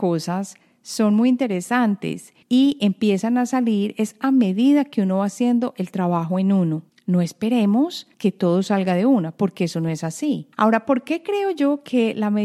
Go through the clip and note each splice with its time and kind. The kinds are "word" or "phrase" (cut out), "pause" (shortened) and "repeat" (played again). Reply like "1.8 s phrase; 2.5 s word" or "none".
2.4 s pause; 6.9 s pause; 8.1 s pause; 10.5 s pause